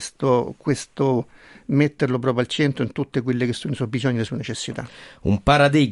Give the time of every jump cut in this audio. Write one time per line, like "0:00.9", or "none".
none